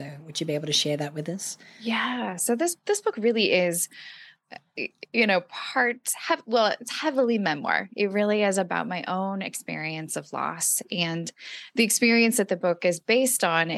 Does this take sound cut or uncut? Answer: uncut